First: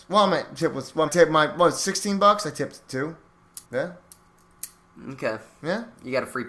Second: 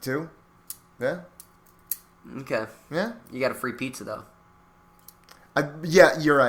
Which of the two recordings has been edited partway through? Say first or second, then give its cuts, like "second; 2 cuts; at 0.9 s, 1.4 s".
first; 2 cuts; at 1.1 s, 3.6 s